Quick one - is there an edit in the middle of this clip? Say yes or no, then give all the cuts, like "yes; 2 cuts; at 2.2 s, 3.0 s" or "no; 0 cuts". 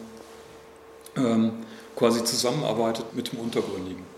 yes; 1 cut; at 3.1 s